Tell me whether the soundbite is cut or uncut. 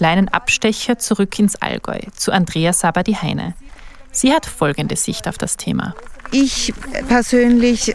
uncut